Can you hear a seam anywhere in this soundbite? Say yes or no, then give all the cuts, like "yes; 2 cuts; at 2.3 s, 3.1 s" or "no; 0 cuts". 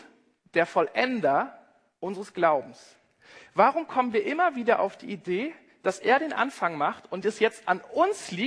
no; 0 cuts